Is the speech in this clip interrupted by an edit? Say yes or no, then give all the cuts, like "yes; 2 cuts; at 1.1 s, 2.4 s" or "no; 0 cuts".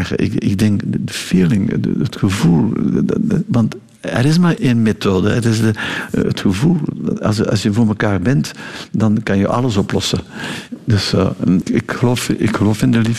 yes; 2 cuts; at 4.6 s, 11.6 s